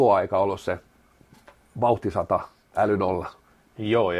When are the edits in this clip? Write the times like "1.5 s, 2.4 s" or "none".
none

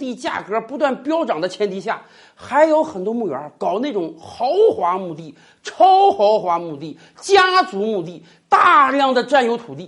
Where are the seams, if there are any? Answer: none

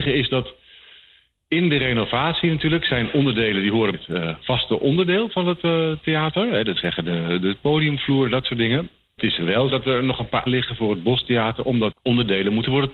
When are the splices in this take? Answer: 3.9 s, 6.8 s, 9.2 s, 9.7 s, 10.5 s, 11.9 s

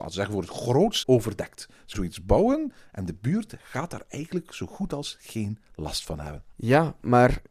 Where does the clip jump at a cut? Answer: 1.0 s, 1.9 s, 6.5 s

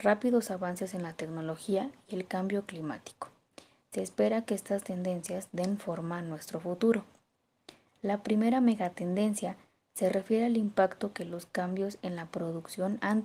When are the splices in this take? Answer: none

